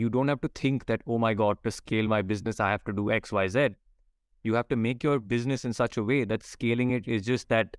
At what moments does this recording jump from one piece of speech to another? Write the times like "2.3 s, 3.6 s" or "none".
none